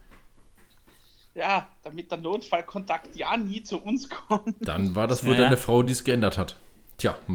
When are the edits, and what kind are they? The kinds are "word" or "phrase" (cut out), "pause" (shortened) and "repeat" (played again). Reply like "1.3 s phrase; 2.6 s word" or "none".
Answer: none